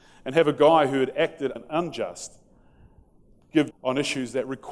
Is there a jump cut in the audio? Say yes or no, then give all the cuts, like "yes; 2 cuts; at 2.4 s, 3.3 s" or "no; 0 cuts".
yes; 2 cuts; at 1.6 s, 3.7 s